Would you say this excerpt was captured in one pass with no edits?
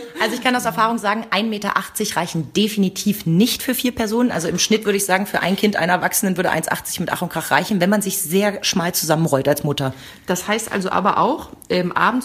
yes; 0 cuts

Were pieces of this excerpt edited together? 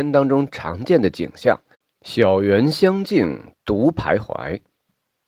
no; 0 cuts

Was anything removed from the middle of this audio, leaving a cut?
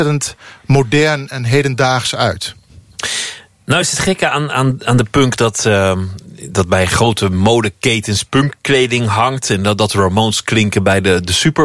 no; 0 cuts

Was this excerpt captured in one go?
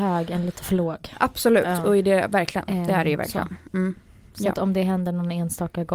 yes; 0 cuts

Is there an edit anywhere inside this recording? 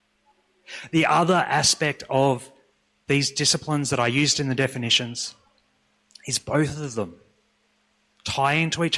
no; 0 cuts

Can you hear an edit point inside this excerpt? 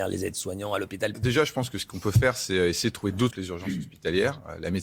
yes; 2 cuts; at 1.1 s, 3.3 s

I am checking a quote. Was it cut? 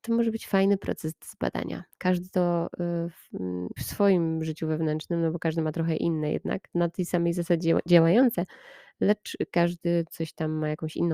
yes; 2 cuts; at 3.8 s, 6.7 s

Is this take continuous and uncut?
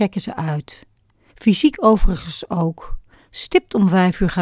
yes; 0 cuts

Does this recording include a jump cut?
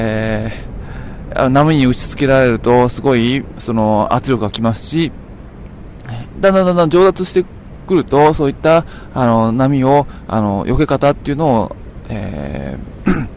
no; 0 cuts

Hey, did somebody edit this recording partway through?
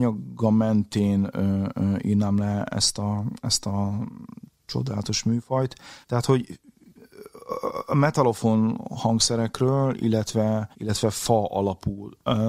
yes; 3 cuts; at 4.5 s, 6.0 s, 10.7 s

